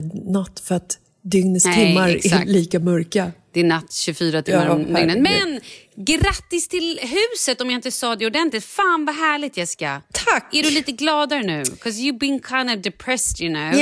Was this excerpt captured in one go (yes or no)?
yes